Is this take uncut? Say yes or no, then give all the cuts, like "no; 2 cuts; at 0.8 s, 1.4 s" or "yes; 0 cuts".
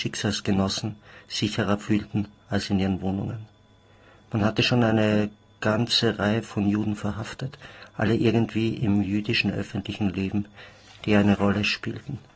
yes; 0 cuts